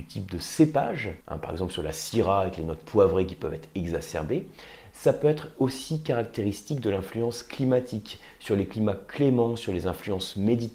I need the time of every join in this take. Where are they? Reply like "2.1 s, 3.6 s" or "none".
1.2 s